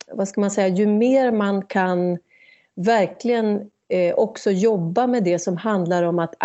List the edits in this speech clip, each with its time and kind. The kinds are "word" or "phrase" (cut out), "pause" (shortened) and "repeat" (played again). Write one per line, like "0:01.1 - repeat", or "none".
none